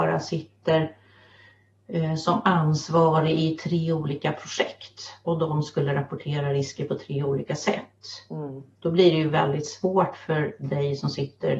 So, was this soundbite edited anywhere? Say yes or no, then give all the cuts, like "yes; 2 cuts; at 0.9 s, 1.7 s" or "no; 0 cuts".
no; 0 cuts